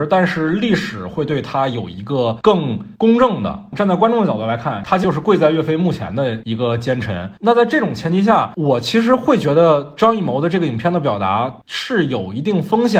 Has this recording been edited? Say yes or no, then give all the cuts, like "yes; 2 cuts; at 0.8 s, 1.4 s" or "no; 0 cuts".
no; 0 cuts